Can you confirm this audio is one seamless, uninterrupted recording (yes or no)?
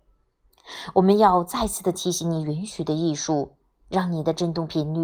yes